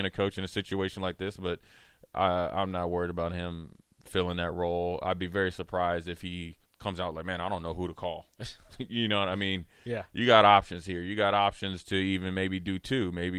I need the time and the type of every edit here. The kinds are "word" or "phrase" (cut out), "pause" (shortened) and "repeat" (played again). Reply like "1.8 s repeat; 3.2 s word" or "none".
6.7 s pause